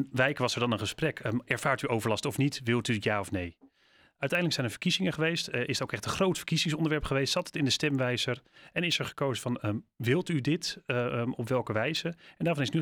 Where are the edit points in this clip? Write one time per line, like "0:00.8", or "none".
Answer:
none